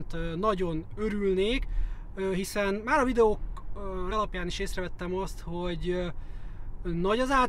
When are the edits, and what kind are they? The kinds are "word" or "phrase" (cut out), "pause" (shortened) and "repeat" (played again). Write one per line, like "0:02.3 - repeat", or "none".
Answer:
0:04.1 - word